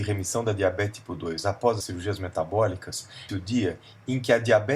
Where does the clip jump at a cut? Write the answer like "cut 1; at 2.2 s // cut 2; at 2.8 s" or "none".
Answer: cut 1; at 1.8 s // cut 2; at 3.3 s

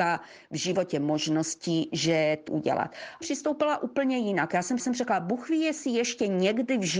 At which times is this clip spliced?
cut 1; at 2.5 s // cut 2; at 3.2 s // cut 3; at 4.8 s

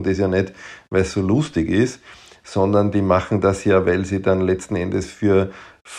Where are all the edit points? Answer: none

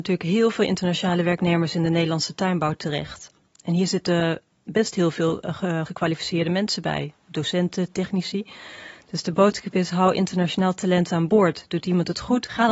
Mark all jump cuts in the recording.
cut 1; at 5.9 s

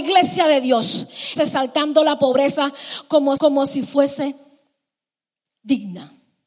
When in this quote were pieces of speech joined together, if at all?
cut 1; at 1.4 s // cut 2; at 3.4 s

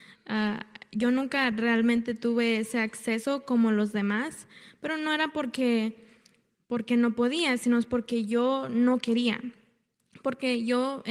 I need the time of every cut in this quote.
none

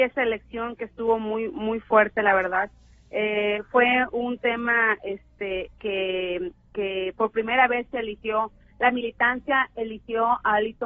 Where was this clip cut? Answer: none

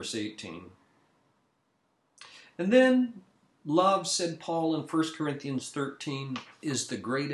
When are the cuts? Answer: none

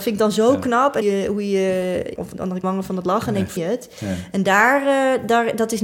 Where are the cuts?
cut 1; at 1.0 s // cut 2; at 2.2 s // cut 3; at 2.6 s // cut 4; at 3.6 s

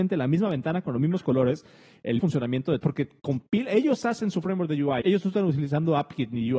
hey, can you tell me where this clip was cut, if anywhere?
cut 1; at 2.2 s // cut 2; at 2.8 s // cut 3; at 5.0 s

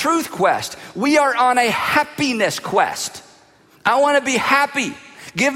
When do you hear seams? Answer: none

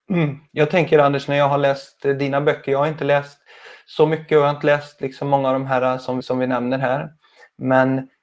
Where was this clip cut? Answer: cut 1; at 6.2 s

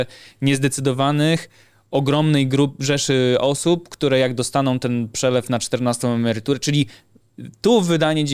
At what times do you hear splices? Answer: none

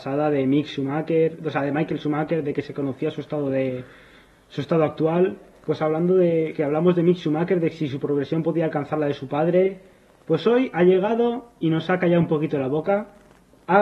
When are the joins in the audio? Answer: none

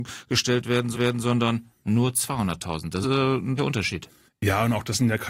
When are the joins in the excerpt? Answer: cut 1; at 0.9 s // cut 2; at 3.0 s // cut 3; at 3.6 s // cut 4; at 4.3 s

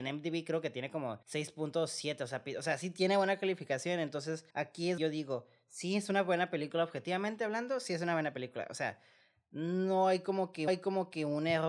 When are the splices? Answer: cut 1; at 1.2 s // cut 2; at 4.5 s // cut 3; at 5.0 s // cut 4; at 10.7 s

